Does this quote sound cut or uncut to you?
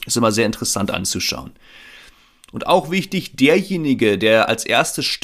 uncut